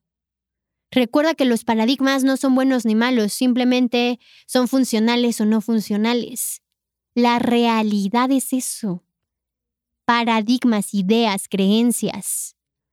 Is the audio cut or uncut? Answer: uncut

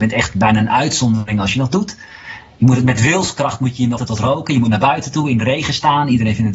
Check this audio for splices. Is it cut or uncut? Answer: cut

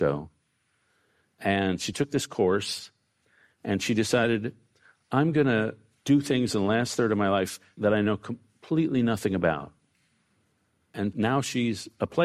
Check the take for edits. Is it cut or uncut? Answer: uncut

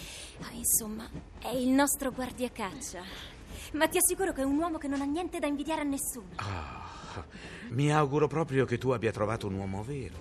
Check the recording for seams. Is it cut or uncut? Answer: uncut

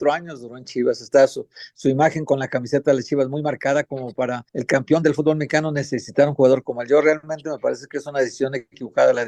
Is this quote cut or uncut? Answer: cut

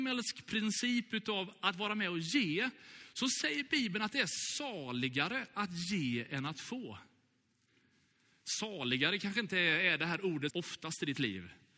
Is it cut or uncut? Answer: cut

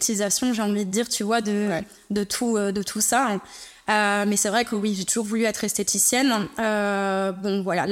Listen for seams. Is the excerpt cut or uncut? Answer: uncut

